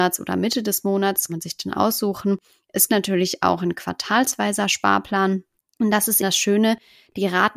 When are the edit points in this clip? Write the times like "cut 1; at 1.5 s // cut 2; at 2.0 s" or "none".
cut 1; at 1.3 s // cut 2; at 2.9 s // cut 3; at 5.6 s // cut 4; at 6.2 s

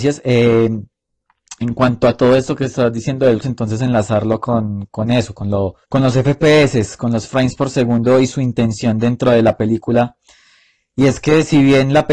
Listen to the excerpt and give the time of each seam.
cut 1; at 3.4 s // cut 2; at 5.8 s

